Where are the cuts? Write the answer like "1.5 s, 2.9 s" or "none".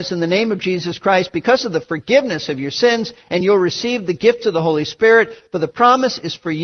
none